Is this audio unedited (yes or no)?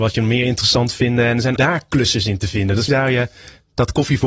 no